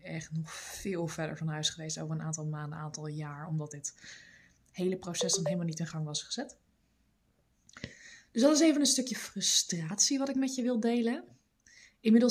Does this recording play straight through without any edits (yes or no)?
yes